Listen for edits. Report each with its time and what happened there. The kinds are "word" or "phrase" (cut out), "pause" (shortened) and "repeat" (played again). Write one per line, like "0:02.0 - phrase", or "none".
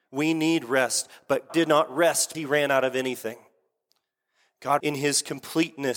0:01.5 - word
0:02.3 - word
0:04.8 - word